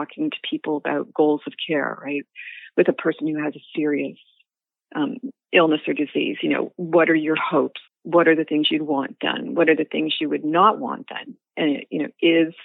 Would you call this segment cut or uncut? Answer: cut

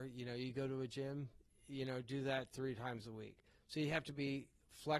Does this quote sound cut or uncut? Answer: uncut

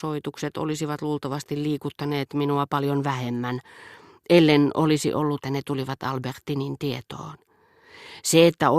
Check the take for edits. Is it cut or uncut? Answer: cut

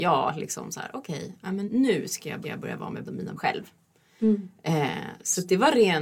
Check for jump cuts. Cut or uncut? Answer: cut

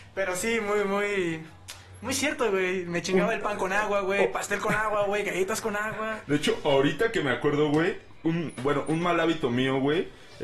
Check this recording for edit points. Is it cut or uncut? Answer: uncut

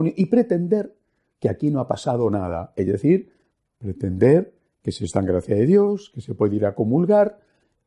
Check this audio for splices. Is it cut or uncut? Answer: uncut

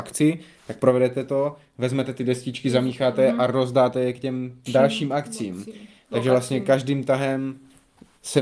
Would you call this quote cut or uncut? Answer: cut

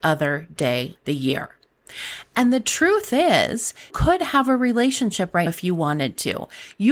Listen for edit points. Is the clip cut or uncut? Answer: cut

